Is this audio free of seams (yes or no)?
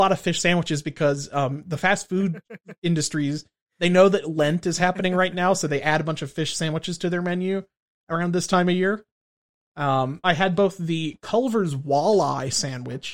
no